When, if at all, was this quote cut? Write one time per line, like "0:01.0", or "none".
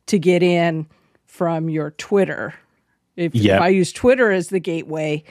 none